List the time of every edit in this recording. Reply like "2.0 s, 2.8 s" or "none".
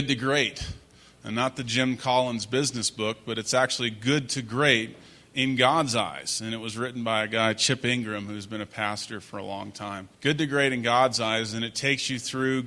10.1 s

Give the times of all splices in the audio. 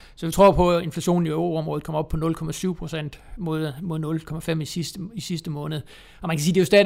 none

